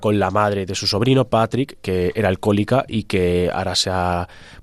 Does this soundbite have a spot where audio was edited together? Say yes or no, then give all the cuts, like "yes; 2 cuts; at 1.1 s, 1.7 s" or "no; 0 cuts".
no; 0 cuts